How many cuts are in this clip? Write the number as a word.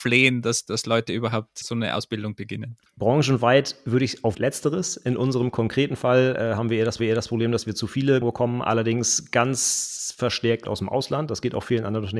five